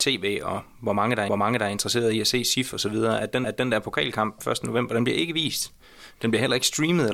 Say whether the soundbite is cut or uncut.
cut